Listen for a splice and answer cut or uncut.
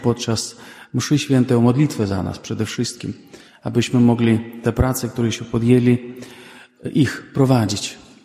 uncut